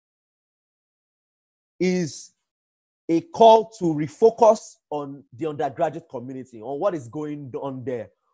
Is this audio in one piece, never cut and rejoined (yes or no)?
no